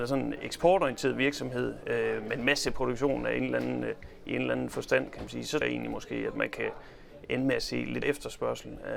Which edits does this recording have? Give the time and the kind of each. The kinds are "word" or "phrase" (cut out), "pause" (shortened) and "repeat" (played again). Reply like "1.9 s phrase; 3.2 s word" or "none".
5.6 s word; 8.0 s word